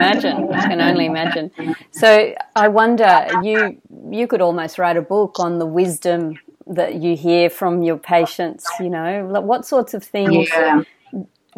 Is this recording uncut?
yes; 0 cuts

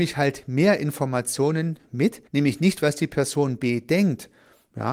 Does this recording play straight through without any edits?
no; 1 cut; at 2.3 s

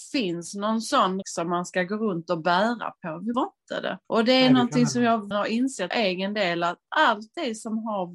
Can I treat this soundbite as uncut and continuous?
no; 5 cuts; at 1.2 s, 3.3 s, 4.0 s, 5.3 s, 5.9 s

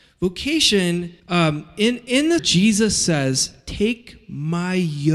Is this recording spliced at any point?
yes; 3 cuts; at 1.2 s, 2.4 s, 3.6 s

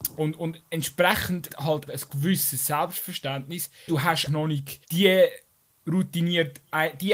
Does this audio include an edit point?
yes; 5 cuts; at 1.5 s, 1.9 s, 3.9 s, 4.3 s, 4.8 s

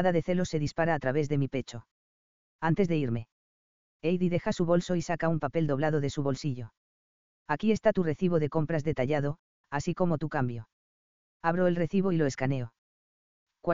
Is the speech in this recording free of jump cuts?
yes; 0 cuts

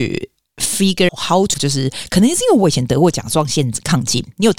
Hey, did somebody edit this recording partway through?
yes; 2 cuts; at 1.1 s, 1.5 s

